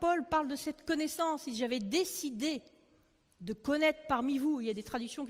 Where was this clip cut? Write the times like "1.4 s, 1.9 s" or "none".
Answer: none